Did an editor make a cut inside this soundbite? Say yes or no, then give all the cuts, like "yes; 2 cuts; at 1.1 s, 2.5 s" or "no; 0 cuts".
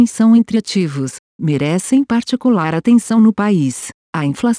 no; 0 cuts